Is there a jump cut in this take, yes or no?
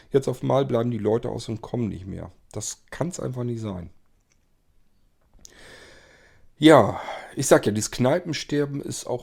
no